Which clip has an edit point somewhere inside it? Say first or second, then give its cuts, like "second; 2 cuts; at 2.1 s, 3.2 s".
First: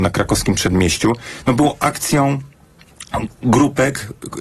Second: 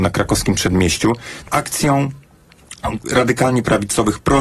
second; 2 cuts; at 1.5 s, 3.0 s